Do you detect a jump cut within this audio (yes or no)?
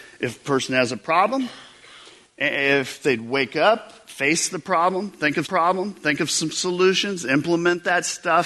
yes